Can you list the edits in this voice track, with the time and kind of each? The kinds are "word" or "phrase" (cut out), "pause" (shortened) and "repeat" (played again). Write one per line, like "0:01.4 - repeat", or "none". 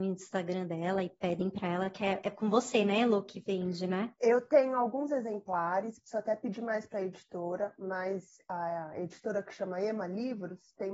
0:02.2 - word